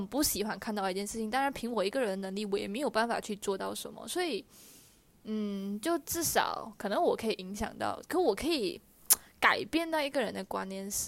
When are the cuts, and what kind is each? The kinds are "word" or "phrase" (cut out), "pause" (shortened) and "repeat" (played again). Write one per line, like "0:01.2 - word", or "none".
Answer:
none